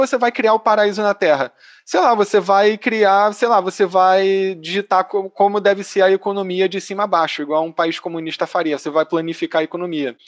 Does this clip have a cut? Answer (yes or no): no